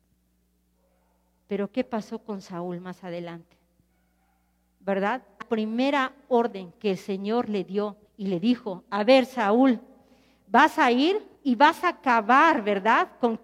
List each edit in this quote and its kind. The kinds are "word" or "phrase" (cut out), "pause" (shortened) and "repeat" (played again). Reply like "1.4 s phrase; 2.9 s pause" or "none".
5.4 s word; 8.1 s pause; 11.3 s pause